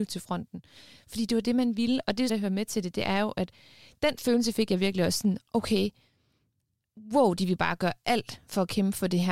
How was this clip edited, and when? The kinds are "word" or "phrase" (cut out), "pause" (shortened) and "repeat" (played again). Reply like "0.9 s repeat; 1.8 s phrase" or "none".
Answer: 2.3 s phrase